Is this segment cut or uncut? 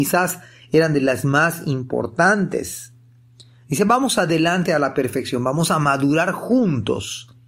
uncut